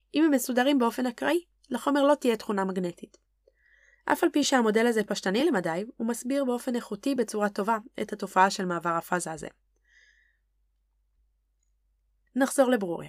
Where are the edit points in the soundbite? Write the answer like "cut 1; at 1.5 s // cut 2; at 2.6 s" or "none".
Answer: none